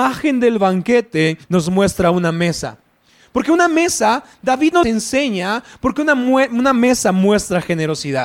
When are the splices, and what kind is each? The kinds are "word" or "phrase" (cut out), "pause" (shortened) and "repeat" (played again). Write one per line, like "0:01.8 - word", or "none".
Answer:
0:01.4 - pause
0:04.8 - word